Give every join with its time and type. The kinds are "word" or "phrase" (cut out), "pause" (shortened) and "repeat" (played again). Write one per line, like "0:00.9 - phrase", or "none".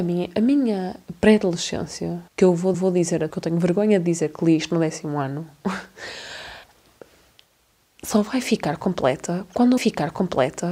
0:02.3 - pause
0:02.7 - repeat
0:03.3 - phrase
0:06.6 - pause
0:09.8 - repeat